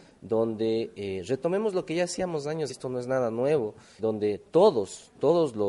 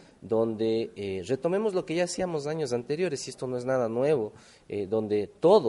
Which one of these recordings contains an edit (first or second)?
first